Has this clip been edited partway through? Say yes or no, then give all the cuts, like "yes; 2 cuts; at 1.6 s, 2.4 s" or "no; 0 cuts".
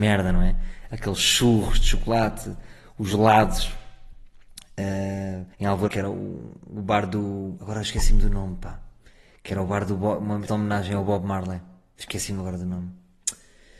yes; 3 cuts; at 5.5 s, 5.9 s, 10.5 s